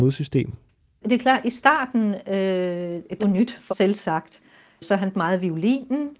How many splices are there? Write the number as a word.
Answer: three